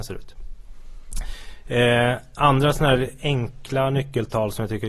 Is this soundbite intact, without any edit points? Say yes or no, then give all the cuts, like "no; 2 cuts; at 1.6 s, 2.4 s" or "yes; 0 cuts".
yes; 0 cuts